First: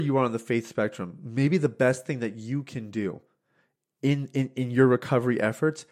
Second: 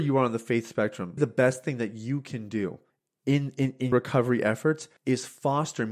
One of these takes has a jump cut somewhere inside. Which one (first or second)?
second